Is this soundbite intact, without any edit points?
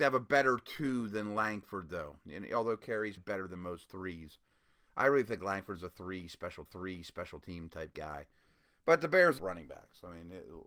no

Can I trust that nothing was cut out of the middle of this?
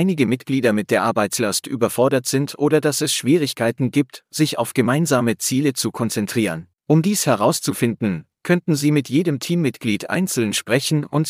no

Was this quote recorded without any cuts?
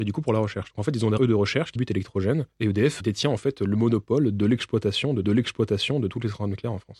no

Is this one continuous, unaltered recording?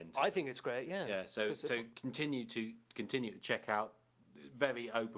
yes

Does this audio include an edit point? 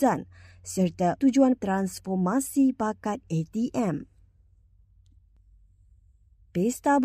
yes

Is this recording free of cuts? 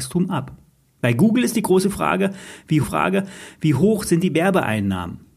no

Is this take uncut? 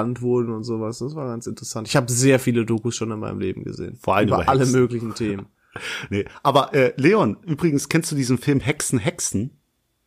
yes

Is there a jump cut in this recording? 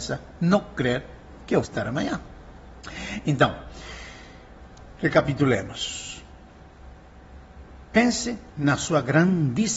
yes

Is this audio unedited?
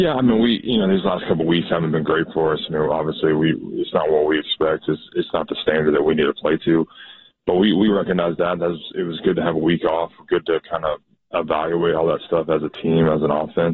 yes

